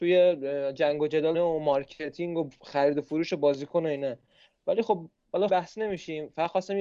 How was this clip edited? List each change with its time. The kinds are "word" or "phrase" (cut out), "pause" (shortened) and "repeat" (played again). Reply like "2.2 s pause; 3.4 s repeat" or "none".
1.3 s word; 5.5 s phrase